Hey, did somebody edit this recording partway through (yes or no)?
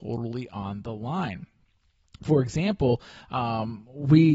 no